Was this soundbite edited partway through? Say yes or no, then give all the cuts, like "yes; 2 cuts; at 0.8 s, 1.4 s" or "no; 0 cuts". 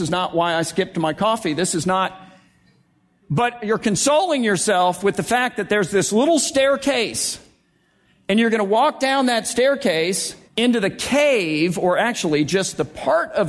yes; 1 cut; at 10.5 s